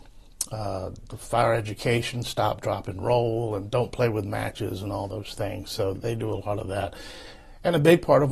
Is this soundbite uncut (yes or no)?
no